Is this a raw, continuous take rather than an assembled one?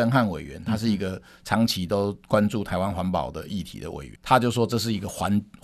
no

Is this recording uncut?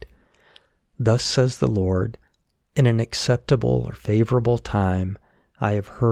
yes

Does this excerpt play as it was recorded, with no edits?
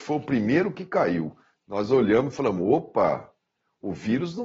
yes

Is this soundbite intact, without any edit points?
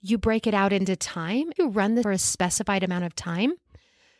no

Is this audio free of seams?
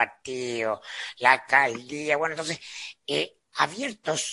yes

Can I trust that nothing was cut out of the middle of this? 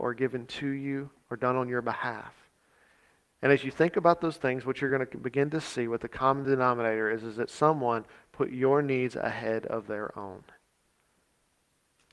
yes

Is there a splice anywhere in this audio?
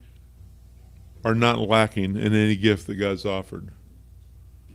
no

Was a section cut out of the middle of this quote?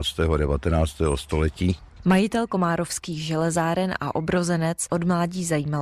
yes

